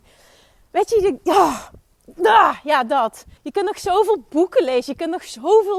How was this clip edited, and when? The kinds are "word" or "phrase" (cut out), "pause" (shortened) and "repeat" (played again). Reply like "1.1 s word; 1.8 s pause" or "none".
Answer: 3.4 s pause